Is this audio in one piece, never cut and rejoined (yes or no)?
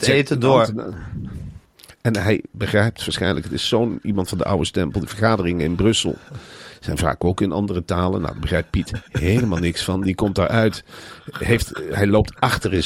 yes